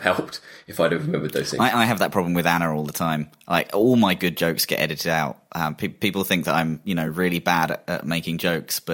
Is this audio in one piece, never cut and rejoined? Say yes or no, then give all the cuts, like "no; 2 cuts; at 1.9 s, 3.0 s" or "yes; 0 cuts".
yes; 0 cuts